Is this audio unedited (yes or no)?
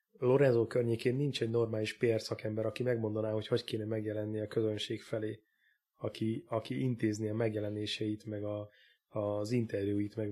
yes